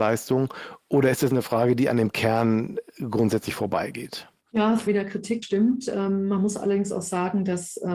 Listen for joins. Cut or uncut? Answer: cut